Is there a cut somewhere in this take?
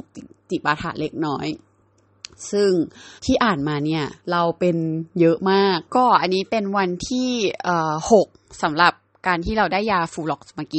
yes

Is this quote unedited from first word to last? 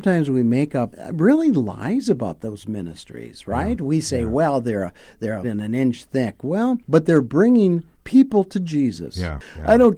no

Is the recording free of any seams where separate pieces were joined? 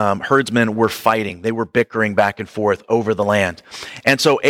yes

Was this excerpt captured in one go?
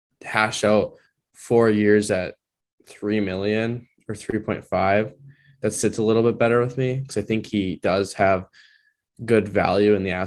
yes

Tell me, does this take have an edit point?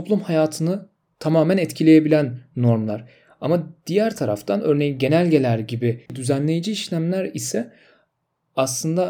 yes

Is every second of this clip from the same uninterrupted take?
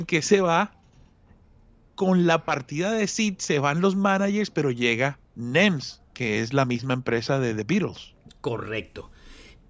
yes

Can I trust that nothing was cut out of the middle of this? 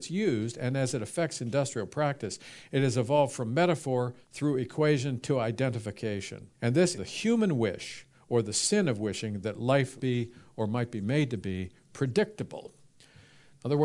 no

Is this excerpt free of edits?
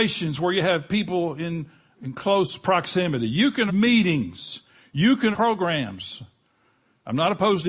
no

